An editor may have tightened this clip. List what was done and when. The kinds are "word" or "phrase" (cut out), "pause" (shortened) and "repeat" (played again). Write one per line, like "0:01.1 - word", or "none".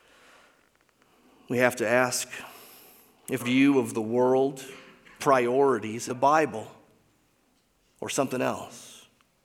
0:03.4 - word
0:05.2 - word
0:06.1 - phrase

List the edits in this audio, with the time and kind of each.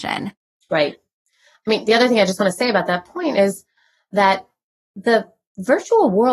none

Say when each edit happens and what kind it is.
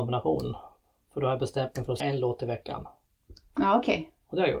0:02.0 - word

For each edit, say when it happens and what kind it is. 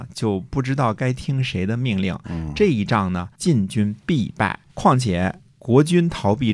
0:03.3 - pause
0:04.7 - pause

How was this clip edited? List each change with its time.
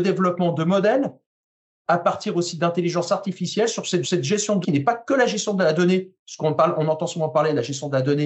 0:04.0 - repeat
0:04.6 - word

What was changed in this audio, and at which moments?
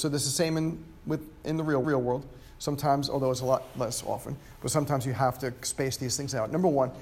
0:01.8 - repeat

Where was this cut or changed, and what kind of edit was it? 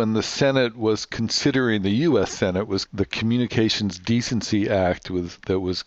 0:02.9 - word

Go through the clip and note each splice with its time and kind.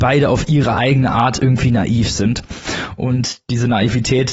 none

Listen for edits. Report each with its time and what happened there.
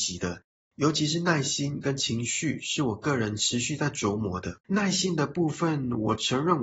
0:04.6 - pause

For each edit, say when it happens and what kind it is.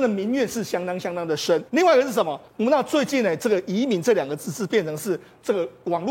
0:01.7 - pause
0:02.5 - pause

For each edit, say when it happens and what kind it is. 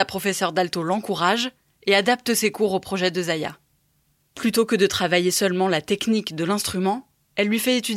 none

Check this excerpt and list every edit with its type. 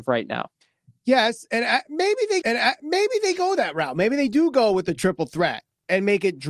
0:02.4 - repeat

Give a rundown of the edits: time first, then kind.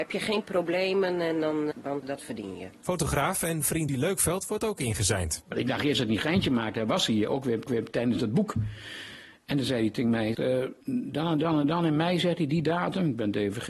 0:01.7 - word
0:02.0 - word
0:03.9 - word
0:07.7 - repeat
0:10.3 - word
0:10.8 - pause

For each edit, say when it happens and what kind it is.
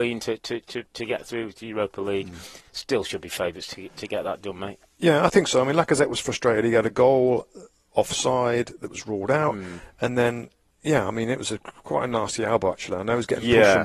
none

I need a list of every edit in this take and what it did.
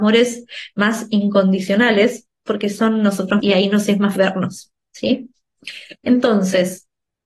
0:03.4 - word
0:04.2 - word
0:06.0 - pause

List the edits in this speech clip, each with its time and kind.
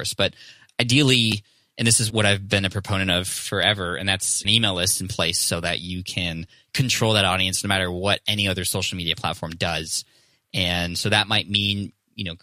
0:02.1 - word
0:04.4 - word

